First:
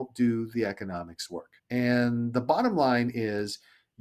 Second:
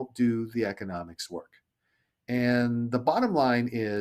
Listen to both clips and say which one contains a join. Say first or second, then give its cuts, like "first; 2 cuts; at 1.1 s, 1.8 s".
first; 1 cut; at 1.6 s